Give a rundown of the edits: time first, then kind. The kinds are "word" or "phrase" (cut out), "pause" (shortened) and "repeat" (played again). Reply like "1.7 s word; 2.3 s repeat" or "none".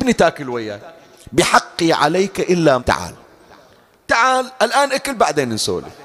1.1 s pause; 2.8 s phrase